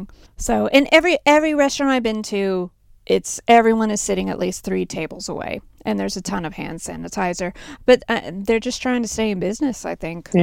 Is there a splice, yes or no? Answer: no